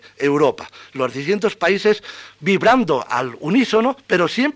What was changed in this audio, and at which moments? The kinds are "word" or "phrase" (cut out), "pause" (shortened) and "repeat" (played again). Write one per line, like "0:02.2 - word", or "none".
none

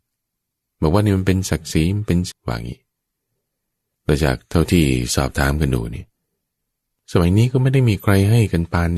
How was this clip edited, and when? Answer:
0:02.3 - word

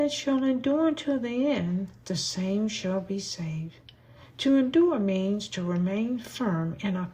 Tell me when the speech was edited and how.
none

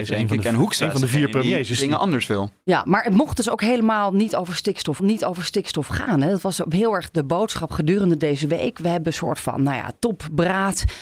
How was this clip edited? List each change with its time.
0:05.0 - repeat

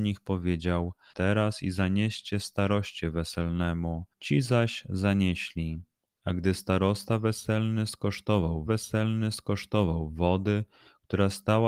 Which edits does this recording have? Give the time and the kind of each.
0:01.1 - word
0:04.1 - pause
0:08.7 - repeat

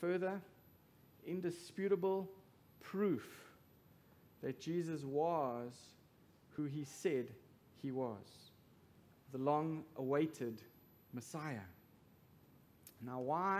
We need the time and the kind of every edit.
none

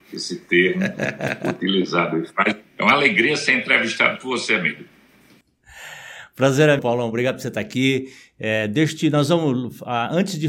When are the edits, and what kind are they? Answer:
0:02.7 - pause
0:06.8 - word

